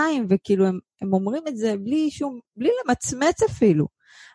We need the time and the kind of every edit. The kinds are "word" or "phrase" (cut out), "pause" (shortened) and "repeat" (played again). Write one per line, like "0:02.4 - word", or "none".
0:02.5 - pause